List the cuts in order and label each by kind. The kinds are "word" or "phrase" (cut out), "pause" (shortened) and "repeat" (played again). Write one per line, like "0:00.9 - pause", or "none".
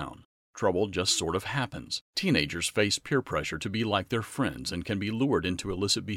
0:02.1 - pause